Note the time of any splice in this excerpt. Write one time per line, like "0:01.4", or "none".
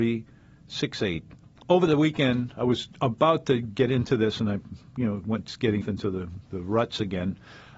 0:01.6
0:05.8
0:06.5